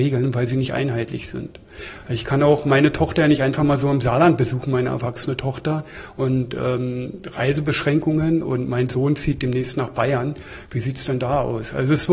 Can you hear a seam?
no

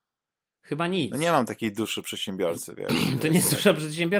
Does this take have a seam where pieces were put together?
no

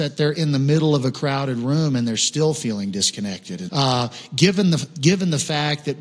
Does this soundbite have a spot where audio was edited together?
yes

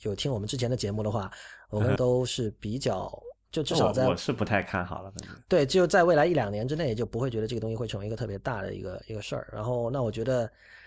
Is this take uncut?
no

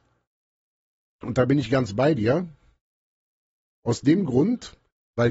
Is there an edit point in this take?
no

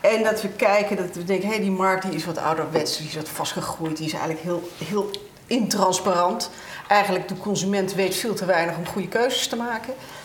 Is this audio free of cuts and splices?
yes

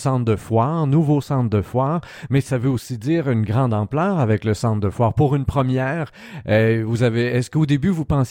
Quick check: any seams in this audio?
no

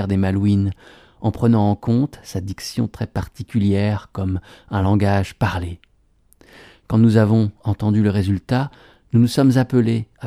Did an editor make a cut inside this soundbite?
no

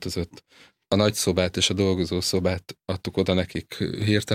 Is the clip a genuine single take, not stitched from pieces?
yes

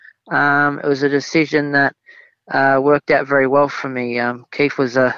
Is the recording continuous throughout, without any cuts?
yes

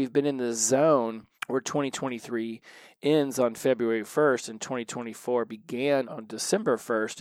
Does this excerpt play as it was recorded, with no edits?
no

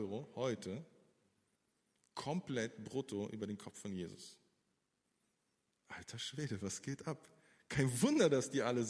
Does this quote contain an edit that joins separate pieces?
no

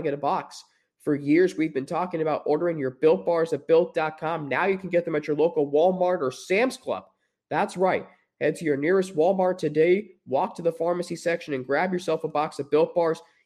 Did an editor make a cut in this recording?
no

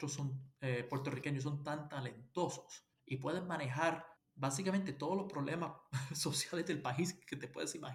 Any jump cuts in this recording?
yes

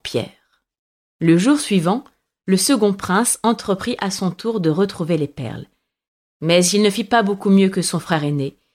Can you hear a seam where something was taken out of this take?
no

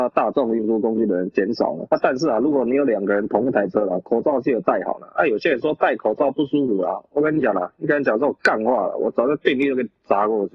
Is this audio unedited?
yes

